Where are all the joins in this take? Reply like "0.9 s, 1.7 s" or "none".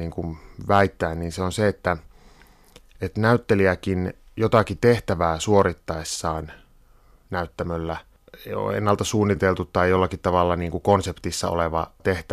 none